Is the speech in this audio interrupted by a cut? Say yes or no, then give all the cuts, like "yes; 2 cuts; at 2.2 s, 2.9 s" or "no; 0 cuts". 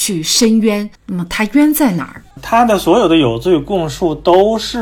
yes; 2 cuts; at 0.9 s, 2.3 s